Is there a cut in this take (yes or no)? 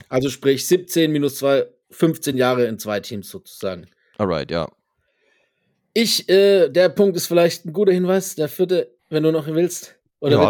no